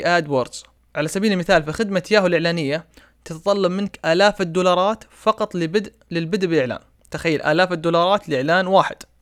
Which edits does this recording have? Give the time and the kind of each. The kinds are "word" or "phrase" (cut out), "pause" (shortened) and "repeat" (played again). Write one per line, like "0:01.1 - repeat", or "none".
none